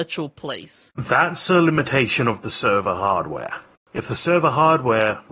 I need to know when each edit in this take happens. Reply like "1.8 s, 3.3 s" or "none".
none